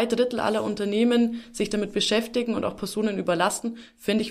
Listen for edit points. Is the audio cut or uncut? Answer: uncut